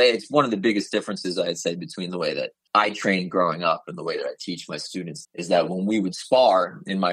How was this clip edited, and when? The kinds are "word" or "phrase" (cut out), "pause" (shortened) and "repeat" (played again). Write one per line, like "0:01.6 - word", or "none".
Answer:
0:05.2 - word